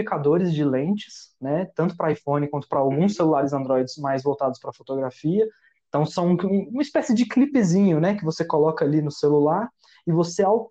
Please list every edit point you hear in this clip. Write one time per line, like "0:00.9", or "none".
none